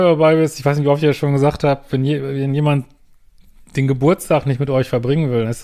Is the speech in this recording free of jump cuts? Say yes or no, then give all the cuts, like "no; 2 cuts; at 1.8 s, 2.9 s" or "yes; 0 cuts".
yes; 0 cuts